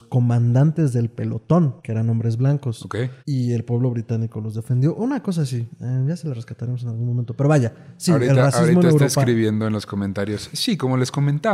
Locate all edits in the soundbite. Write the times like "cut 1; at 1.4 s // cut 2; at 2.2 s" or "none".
cut 1; at 1.8 s // cut 2; at 3.2 s